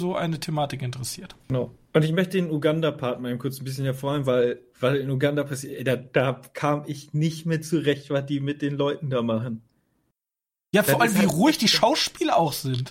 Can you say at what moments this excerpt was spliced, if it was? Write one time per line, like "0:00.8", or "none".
0:01.4